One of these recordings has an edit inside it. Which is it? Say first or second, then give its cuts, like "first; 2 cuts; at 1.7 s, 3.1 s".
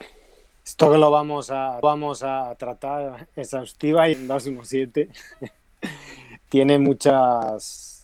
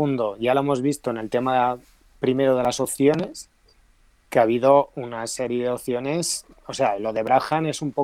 first; 3 cuts; at 1.8 s, 4.1 s, 6.5 s